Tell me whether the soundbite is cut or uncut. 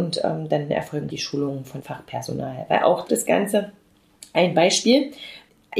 cut